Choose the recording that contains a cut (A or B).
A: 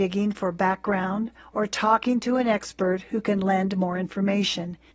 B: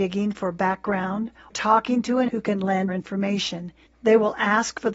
B